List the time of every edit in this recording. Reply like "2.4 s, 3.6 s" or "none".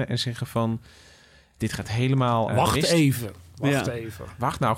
2.5 s